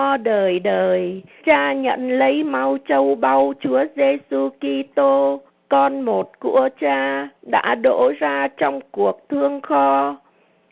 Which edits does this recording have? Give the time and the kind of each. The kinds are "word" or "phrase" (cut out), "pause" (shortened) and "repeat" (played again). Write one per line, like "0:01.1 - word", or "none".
0:01.4 - word
0:05.5 - pause
0:07.4 - pause